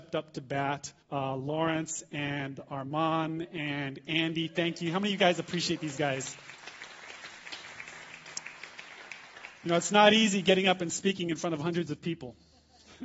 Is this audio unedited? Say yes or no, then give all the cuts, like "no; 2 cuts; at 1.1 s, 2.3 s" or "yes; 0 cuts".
no; 1 cut; at 1.0 s